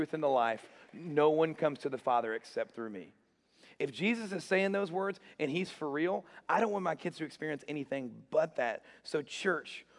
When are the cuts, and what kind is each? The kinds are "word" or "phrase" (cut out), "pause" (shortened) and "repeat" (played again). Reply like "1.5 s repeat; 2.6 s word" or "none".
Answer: none

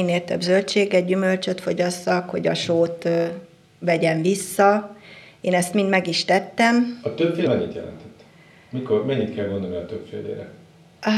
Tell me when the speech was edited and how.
7.5 s word

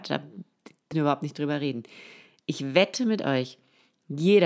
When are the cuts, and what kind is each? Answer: 0.9 s word

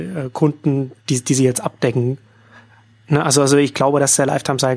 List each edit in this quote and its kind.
none

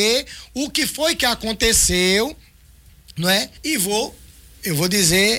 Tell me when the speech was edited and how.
3.6 s pause; 4.3 s pause

